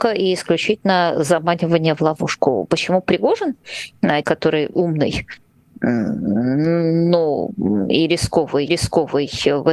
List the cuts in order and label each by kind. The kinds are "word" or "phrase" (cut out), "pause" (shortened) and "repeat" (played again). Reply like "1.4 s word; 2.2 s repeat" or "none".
4.2 s word; 4.7 s word; 8.7 s repeat